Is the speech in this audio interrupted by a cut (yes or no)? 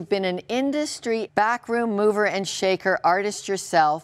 yes